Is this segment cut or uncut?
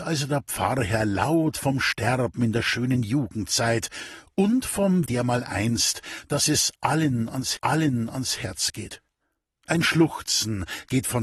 cut